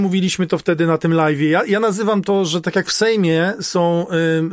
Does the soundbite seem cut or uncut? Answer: uncut